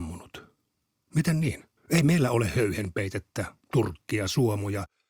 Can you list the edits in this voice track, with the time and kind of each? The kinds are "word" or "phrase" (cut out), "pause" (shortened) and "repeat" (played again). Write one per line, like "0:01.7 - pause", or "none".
0:01.8 - pause